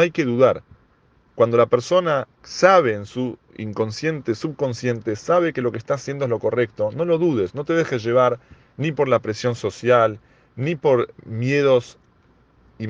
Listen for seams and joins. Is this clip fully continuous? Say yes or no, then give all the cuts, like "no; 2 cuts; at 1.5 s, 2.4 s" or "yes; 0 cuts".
no; 2 cuts; at 2.3 s, 11.2 s